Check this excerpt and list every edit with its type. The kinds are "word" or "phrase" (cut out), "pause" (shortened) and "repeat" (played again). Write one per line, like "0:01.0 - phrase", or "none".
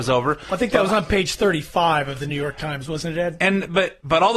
none